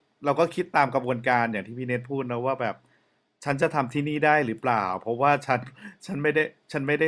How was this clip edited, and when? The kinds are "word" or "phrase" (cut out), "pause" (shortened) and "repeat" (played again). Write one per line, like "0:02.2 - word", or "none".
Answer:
none